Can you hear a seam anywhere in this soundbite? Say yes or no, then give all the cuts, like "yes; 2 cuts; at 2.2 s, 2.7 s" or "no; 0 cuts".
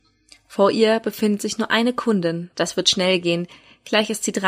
no; 0 cuts